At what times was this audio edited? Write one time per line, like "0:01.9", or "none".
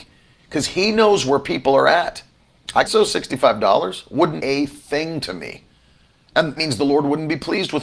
0:02.8
0:04.4
0:06.6